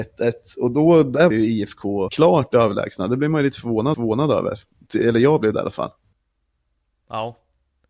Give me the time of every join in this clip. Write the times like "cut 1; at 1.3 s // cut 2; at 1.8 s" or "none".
cut 1; at 1.3 s // cut 2; at 2.1 s // cut 3; at 3.9 s